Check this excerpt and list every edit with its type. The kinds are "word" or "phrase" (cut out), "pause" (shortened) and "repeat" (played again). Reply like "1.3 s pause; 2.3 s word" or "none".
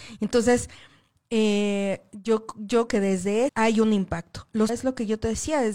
2.9 s word; 3.5 s word; 4.7 s word

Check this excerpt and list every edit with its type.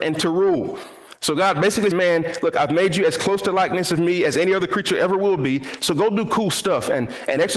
1.9 s phrase

